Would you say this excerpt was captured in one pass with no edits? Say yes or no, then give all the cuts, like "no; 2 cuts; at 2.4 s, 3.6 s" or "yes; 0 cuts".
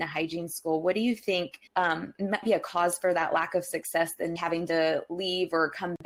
no; 3 cuts; at 1.7 s, 2.4 s, 4.4 s